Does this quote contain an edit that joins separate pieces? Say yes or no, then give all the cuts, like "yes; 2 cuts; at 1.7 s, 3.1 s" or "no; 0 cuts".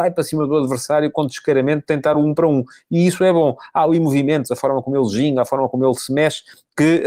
no; 0 cuts